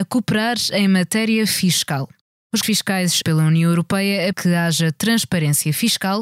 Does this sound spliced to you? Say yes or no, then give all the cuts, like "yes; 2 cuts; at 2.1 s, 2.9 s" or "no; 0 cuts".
yes; 3 cuts; at 2.6 s, 3.2 s, 4.3 s